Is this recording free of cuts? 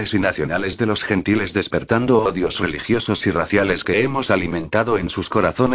yes; 0 cuts

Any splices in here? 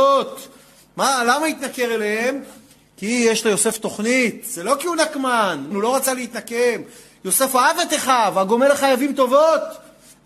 yes; 1 cut; at 5.7 s

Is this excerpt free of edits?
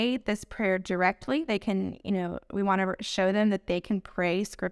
yes; 0 cuts

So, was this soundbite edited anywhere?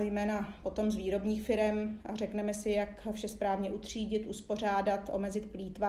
no; 0 cuts

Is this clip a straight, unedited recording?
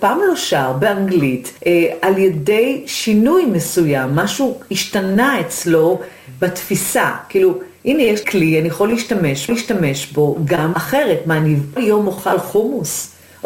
no; 5 cuts; at 1.6 s, 8.2 s, 9.5 s, 10.7 s, 11.8 s

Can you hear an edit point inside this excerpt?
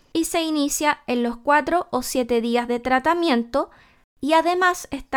no; 0 cuts

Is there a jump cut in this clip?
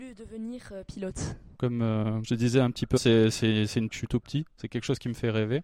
yes; 4 cuts; at 1.5 s, 2.2 s, 3.0 s, 3.9 s

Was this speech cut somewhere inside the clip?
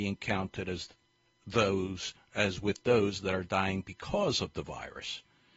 no; 0 cuts

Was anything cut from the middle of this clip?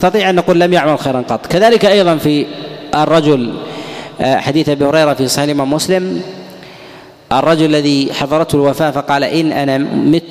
no; 0 cuts

